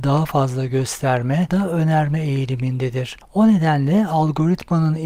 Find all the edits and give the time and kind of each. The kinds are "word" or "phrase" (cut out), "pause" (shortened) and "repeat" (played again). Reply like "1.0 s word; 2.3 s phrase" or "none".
1.5 s phrase